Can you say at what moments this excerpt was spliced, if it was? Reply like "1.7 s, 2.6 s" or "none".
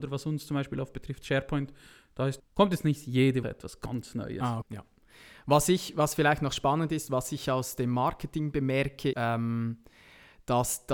2.4 s, 3.4 s, 4.6 s, 9.1 s